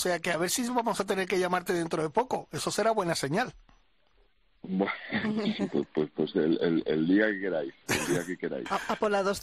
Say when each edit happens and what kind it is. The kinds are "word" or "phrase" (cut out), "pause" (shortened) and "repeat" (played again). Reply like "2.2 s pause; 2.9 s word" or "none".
none